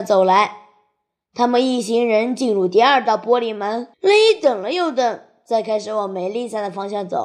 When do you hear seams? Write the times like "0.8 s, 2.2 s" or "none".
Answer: 3.9 s